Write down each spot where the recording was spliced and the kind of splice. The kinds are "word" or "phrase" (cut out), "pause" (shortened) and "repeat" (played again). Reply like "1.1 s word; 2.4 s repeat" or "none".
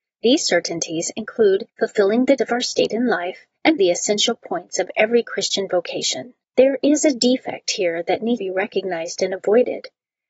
1.7 s pause; 2.4 s word; 3.8 s word; 6.4 s pause; 8.4 s word